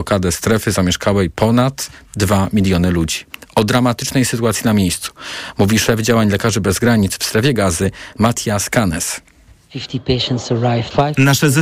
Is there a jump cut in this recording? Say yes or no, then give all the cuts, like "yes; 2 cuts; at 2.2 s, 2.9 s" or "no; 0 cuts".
yes; 1 cut; at 1.3 s